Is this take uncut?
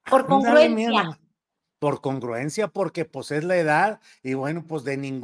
yes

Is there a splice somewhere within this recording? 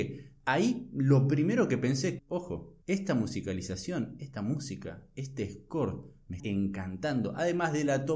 yes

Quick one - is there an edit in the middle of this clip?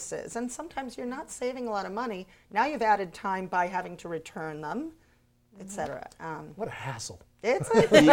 no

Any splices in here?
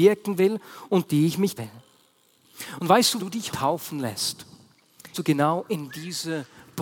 yes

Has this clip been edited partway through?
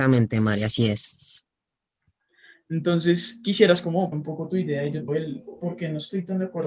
yes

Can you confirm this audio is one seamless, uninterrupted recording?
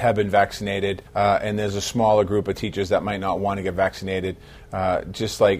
no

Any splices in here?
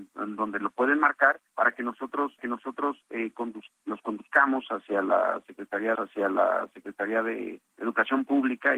yes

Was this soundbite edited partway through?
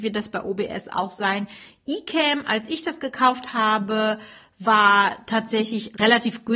no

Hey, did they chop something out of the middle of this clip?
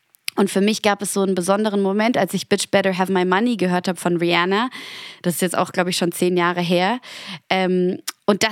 no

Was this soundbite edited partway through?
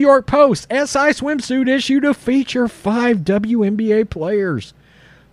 no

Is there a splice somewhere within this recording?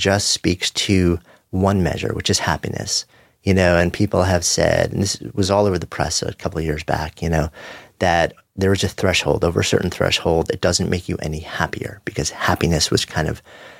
no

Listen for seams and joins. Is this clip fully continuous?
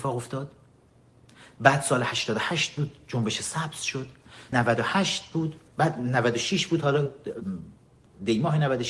no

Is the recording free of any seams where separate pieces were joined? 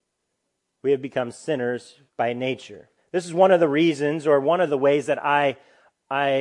no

